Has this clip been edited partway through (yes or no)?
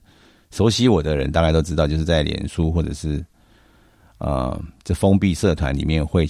no